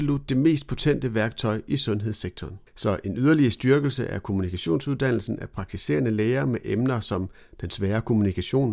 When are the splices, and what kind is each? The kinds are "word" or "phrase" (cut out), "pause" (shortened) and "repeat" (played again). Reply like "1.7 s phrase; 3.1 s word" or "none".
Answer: 2.7 s pause

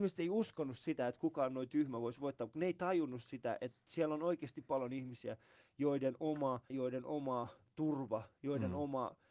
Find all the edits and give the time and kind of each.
6.7 s word

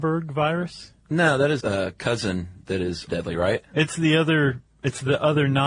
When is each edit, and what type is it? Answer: 1.0 s pause; 1.6 s word; 3.1 s word

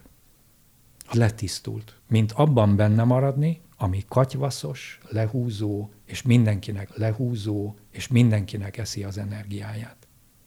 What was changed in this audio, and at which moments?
1.1 s word; 2.0 s pause; 3.7 s pause; 6.9 s repeat

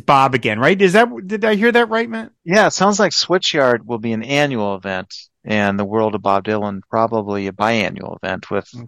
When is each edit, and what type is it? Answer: 2.4 s pause; 6.9 s pause

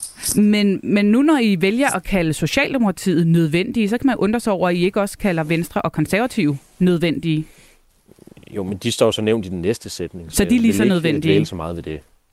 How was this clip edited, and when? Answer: none

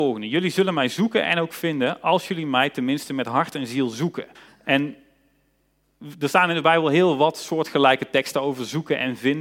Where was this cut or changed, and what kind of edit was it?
4.3 s pause

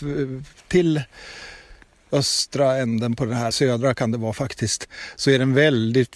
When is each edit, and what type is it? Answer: 3.5 s word

